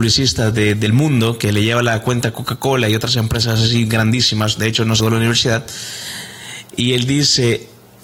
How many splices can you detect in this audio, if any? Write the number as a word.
one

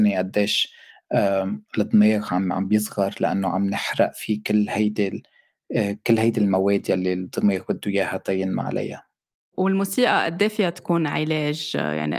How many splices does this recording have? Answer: zero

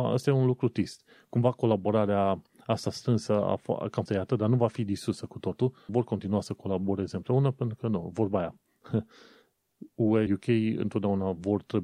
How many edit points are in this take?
three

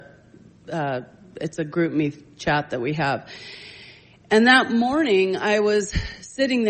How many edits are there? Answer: zero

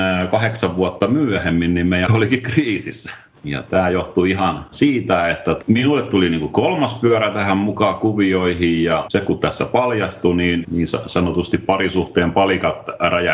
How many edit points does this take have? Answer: one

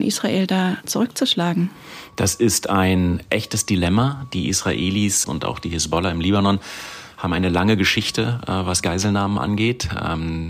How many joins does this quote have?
one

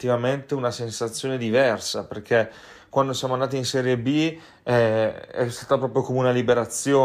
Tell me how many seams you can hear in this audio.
zero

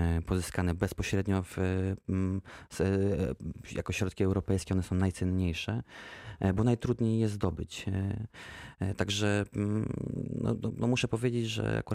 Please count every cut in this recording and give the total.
zero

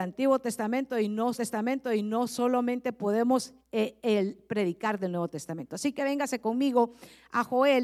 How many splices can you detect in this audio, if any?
two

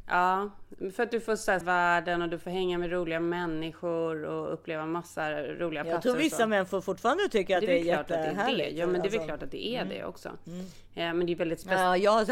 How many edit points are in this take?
one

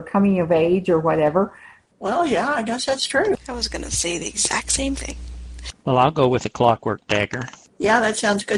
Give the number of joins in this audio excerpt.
zero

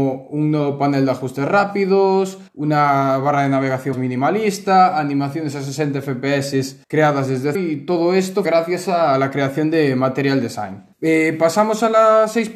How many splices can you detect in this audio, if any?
six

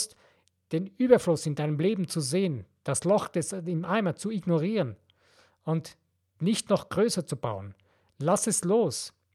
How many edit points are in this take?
zero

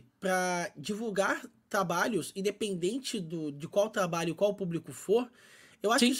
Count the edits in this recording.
zero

